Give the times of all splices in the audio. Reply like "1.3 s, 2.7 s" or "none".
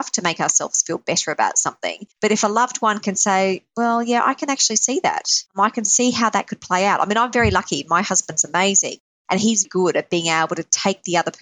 2.1 s, 5.5 s, 9.6 s